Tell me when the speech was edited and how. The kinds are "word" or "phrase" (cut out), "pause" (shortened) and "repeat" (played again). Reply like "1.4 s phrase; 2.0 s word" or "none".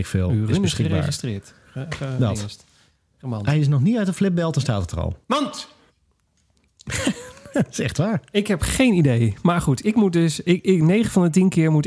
5.2 s pause